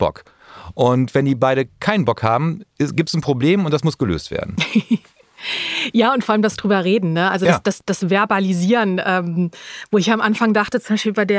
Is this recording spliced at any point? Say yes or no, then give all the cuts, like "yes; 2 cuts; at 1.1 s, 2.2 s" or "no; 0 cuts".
no; 0 cuts